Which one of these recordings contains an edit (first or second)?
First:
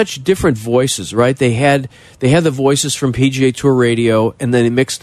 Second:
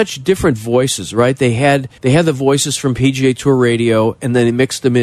second